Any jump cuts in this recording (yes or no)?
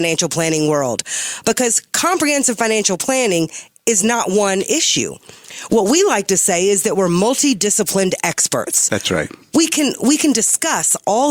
no